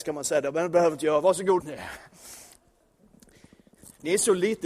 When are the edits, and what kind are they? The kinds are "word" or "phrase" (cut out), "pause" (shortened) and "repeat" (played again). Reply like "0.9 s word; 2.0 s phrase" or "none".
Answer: 1.6 s phrase